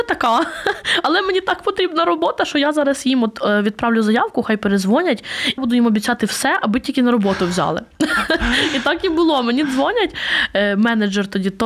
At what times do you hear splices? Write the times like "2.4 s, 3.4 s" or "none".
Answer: 5.6 s